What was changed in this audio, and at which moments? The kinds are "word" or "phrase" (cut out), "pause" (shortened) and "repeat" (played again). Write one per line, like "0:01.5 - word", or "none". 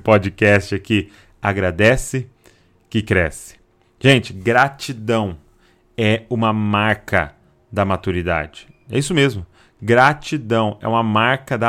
none